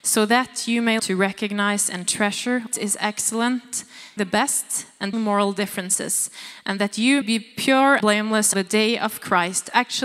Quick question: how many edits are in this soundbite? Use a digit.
7